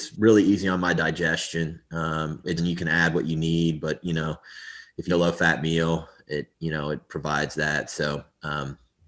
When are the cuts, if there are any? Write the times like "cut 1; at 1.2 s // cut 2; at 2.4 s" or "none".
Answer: cut 1; at 2.6 s // cut 2; at 5.1 s // cut 3; at 6.5 s